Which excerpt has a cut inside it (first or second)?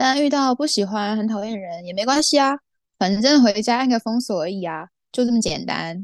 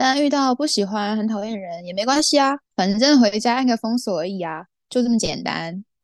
second